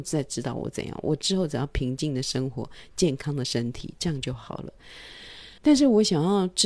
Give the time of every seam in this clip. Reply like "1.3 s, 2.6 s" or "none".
5.6 s

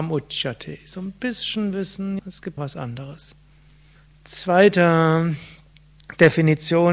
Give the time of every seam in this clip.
2.2 s, 2.6 s, 4.0 s

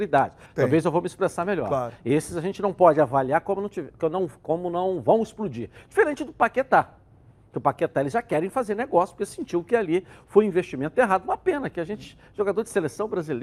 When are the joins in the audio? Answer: none

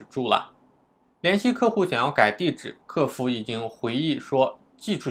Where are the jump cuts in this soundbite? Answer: 2.8 s

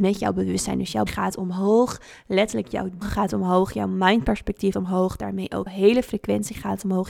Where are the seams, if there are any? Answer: 1.1 s, 3.0 s, 4.7 s, 5.7 s

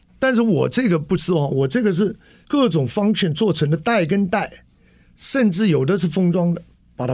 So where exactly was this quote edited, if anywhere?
none

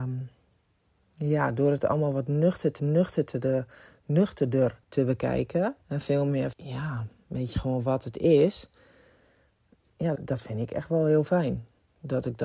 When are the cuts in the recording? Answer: 2.8 s, 4.8 s, 5.8 s, 6.5 s, 7.5 s, 10.2 s

